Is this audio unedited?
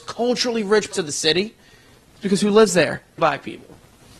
no; 2 cuts; at 0.9 s, 3.2 s

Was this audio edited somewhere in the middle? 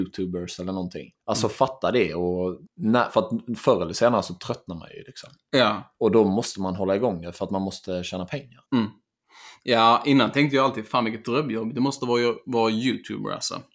yes; 3 cuts; at 1.2 s, 2.7 s, 8.7 s

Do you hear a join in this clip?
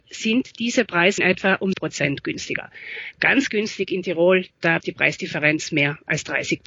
yes; 4 cuts; at 1.2 s, 1.7 s, 3.5 s, 4.8 s

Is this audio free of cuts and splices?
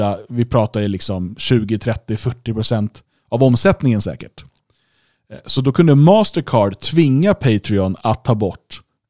yes; 0 cuts

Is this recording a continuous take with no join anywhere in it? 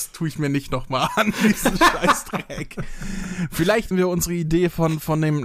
no; 1 cut; at 3.9 s

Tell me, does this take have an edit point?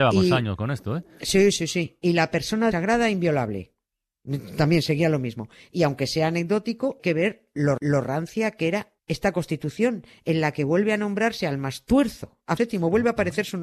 yes; 5 cuts; at 2.7 s, 7.0 s, 7.8 s, 9.0 s, 12.6 s

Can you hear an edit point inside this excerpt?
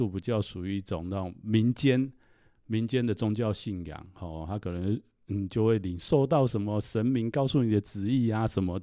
no; 0 cuts

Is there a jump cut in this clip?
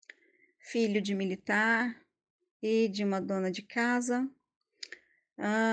no; 0 cuts

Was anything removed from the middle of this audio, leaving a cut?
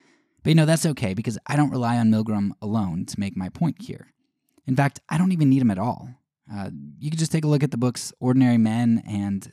no; 0 cuts

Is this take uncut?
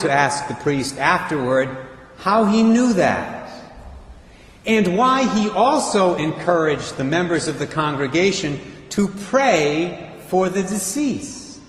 yes; 0 cuts

